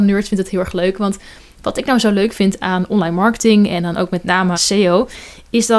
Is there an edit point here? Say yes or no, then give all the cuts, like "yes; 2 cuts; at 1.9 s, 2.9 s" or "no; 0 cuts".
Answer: yes; 1 cut; at 4.5 s